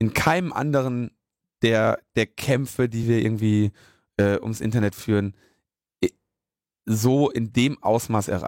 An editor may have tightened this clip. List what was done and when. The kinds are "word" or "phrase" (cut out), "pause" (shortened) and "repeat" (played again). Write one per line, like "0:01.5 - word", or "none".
none